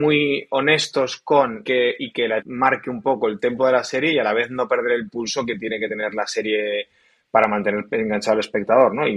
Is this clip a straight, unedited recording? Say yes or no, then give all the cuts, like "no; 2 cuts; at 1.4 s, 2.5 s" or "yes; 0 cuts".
no; 2 cuts; at 1.6 s, 2.4 s